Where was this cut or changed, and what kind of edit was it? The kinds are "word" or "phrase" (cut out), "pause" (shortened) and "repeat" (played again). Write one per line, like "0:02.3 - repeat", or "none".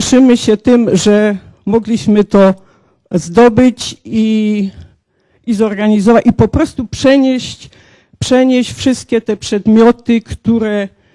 none